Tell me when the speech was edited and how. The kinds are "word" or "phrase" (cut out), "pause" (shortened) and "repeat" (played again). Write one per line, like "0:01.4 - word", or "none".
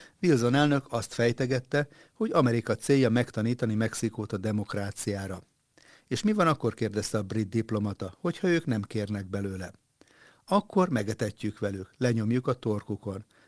none